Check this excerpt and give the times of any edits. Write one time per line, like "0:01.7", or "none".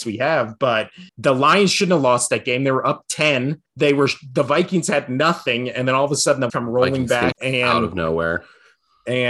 0:01.1
0:03.7
0:06.5
0:07.3